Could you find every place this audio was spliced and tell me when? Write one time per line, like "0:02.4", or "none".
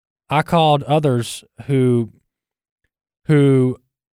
none